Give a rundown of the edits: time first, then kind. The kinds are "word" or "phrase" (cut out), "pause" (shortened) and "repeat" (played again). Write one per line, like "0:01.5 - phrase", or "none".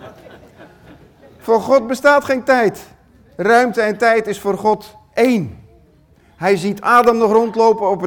none